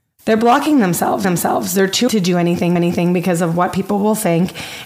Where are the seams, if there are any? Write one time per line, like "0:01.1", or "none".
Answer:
0:01.2
0:02.1
0:02.8